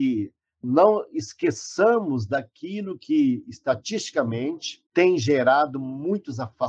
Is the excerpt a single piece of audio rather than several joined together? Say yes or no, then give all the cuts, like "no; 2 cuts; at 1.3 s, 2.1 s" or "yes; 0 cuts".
no; 1 cut; at 4.9 s